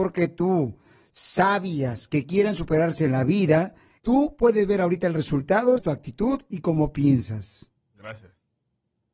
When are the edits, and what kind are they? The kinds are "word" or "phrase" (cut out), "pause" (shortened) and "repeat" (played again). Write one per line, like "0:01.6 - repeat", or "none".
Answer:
0:04.0 - word
0:05.8 - phrase